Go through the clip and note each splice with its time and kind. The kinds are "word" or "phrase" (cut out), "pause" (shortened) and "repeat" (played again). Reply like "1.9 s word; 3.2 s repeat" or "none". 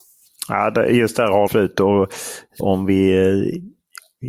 1.5 s word; 2.6 s word

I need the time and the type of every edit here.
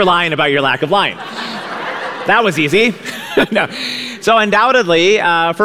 none

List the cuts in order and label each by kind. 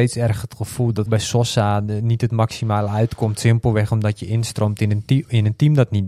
1.1 s word

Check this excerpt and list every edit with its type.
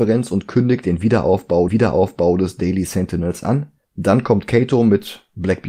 1.7 s repeat; 3.8 s pause

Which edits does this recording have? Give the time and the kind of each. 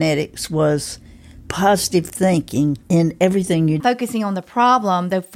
1.4 s word; 2.8 s pause; 3.8 s phrase

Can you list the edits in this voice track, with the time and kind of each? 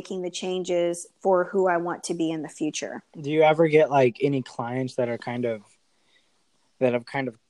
3.1 s pause

